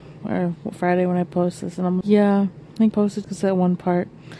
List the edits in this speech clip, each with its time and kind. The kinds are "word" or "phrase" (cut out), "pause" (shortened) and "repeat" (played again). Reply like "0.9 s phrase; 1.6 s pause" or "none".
2.0 s word; 2.9 s word; 3.2 s word